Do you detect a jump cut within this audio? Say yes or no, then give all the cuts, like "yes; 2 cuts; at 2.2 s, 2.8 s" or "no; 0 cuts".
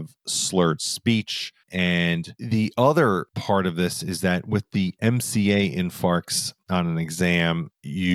yes; 1 cut; at 1.6 s